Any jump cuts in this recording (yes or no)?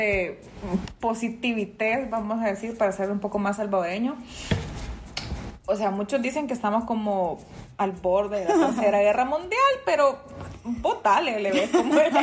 no